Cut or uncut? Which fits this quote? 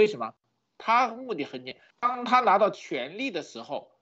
cut